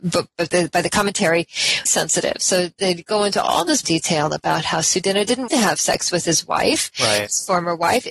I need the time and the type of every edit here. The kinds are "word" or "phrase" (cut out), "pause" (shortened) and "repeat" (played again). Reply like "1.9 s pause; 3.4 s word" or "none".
1.9 s word; 3.8 s word; 5.5 s word